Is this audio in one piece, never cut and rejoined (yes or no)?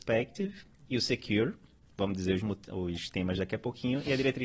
yes